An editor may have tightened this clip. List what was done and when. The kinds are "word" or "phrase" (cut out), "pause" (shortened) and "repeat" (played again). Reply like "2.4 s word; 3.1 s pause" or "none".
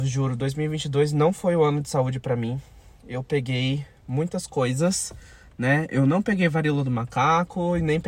none